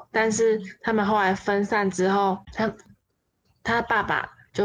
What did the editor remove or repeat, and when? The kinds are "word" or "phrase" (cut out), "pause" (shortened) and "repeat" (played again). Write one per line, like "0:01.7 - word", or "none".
0:02.4 - pause